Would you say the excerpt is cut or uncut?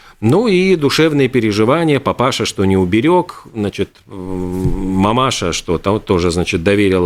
uncut